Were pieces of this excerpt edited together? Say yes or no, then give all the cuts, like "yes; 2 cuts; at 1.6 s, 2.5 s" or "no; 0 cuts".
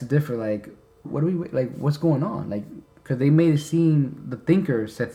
yes; 2 cuts; at 1.0 s, 2.8 s